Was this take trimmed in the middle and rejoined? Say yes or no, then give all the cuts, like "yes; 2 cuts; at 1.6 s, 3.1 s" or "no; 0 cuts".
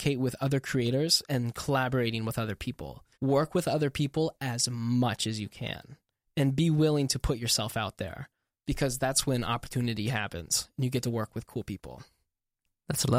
yes; 1 cut; at 3.1 s